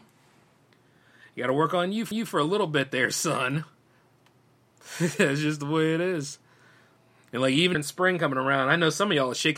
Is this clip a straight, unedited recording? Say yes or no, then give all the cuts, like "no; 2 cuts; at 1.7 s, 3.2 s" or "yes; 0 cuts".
no; 3 cuts; at 2.1 s, 3.9 s, 7.7 s